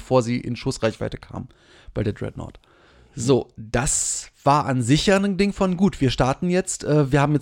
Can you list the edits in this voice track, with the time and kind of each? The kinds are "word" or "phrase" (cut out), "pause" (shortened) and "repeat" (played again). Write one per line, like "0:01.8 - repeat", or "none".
none

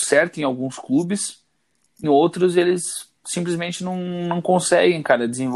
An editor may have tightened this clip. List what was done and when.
0:02.0 - word
0:03.2 - pause

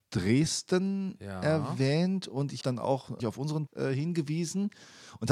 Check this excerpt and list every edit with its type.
0:02.6 - word
0:03.2 - word
0:03.7 - word

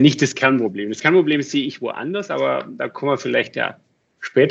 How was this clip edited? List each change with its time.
none

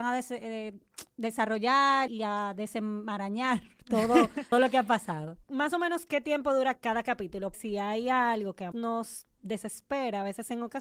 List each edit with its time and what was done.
0:02.1 - word
0:04.5 - word
0:05.4 - word
0:06.7 - word
0:07.5 - word
0:08.7 - word

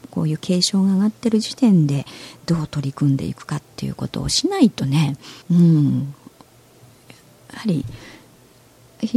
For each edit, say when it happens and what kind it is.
0:05.4 - pause

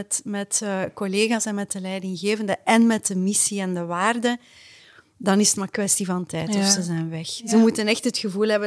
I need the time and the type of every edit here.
none

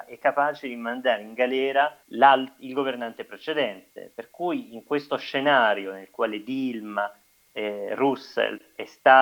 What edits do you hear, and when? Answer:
0:02.0 - pause

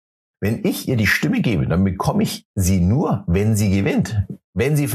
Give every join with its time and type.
none

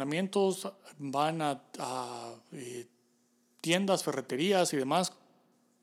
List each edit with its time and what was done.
none

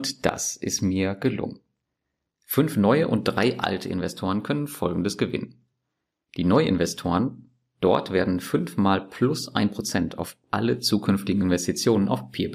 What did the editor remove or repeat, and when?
none

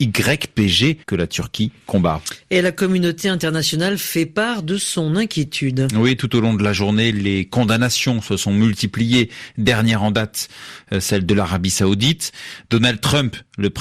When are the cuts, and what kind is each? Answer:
0:01.0 - pause

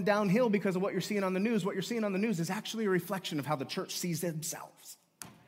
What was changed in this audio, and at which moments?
none

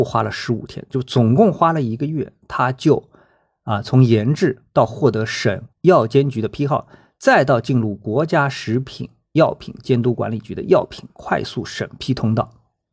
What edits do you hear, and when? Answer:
0:05.7 - pause

